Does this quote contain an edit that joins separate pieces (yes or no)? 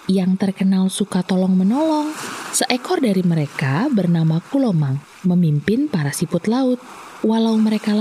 no